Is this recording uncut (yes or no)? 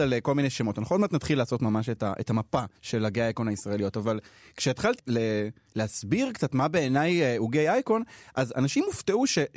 no